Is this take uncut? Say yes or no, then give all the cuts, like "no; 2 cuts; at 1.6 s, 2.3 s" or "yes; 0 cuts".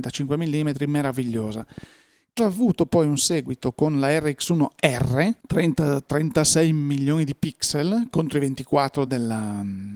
no; 3 cuts; at 2.4 s, 5.4 s, 9.1 s